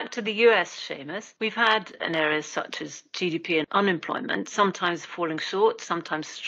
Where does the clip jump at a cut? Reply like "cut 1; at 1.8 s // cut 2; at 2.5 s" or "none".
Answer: cut 1; at 2.0 s